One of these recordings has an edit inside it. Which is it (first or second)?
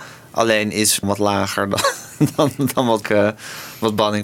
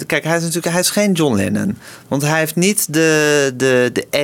first